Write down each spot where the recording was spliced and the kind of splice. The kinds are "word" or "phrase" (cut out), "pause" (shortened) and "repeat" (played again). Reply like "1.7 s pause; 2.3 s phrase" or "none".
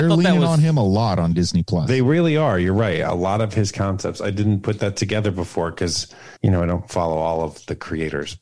6.4 s pause